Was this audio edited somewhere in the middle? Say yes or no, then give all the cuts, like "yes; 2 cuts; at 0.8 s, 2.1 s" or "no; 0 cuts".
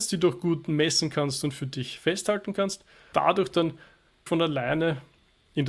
yes; 2 cuts; at 3.1 s, 4.3 s